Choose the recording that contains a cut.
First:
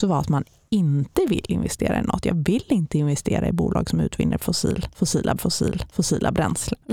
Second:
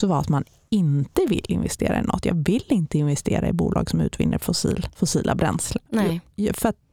first; 1 cut; at 5.4 s

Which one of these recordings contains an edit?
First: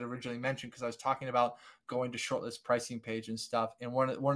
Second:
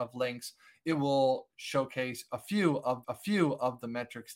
second; 1 cut; at 3.0 s

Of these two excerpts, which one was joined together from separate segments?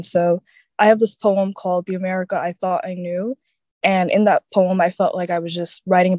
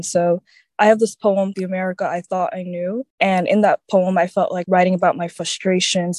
second; 3 cuts; at 1.5 s, 3.1 s, 4.6 s

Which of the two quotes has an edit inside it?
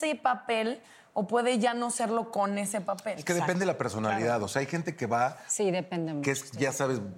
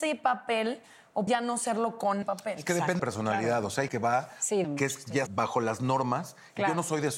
second; 6 cuts; at 1.3 s, 2.2 s, 3.0 s, 3.9 s, 4.6 s, 5.3 s

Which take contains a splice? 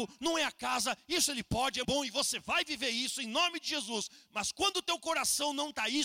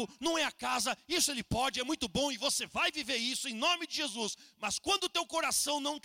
first; 1 cut; at 1.8 s

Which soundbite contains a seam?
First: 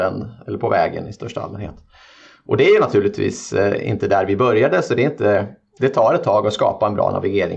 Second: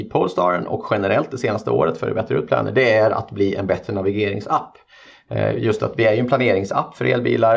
first; 1 cut; at 5.8 s

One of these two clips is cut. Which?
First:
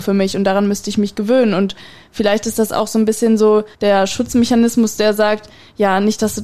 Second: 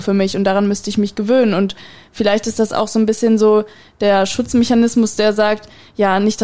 first; 1 cut; at 3.7 s

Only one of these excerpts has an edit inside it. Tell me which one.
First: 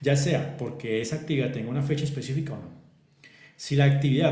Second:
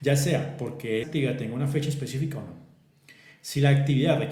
second; 1 cut; at 1.0 s

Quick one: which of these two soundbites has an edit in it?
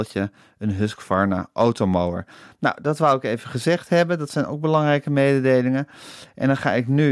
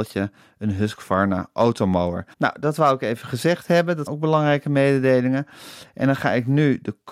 second; 2 cuts; at 2.3 s, 4.1 s

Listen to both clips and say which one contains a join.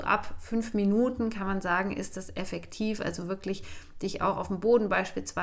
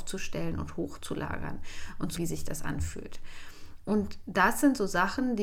second; 1 cut; at 2.2 s

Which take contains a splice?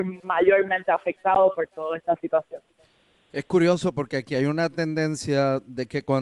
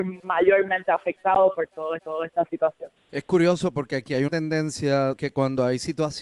second; 4 cuts; at 2.0 s, 3.0 s, 4.3 s, 5.1 s

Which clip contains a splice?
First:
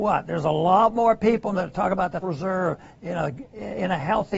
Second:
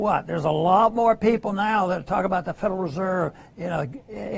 first; 2 cuts; at 1.5 s, 2.2 s

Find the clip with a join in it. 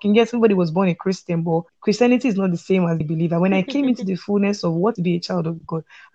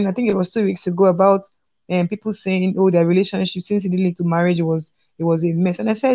first; 3 cuts; at 1.7 s, 3.0 s, 5.0 s

